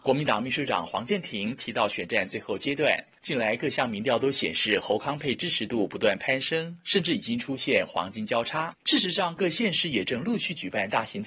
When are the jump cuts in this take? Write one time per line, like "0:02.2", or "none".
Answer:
0:08.7